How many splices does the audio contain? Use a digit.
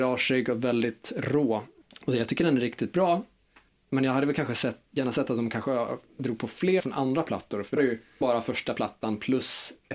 3